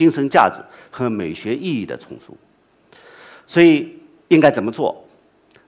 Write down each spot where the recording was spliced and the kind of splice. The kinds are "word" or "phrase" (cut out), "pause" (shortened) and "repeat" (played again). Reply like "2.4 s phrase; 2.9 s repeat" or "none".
none